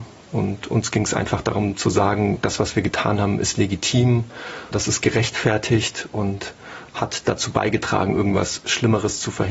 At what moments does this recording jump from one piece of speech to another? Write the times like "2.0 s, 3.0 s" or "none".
4.7 s